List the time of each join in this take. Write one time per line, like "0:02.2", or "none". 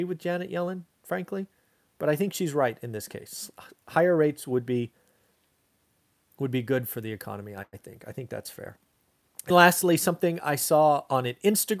0:09.5